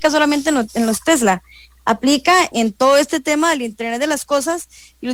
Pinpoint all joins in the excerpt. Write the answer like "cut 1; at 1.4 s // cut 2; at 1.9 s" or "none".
cut 1; at 2.5 s